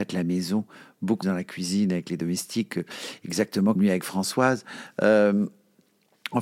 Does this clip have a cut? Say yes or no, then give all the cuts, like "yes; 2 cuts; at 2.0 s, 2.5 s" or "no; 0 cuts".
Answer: yes; 2 cuts; at 1.2 s, 3.8 s